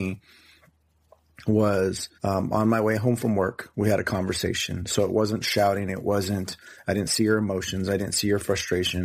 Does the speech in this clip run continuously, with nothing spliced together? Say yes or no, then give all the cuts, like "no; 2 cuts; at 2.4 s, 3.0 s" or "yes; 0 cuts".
no; 1 cut; at 2.2 s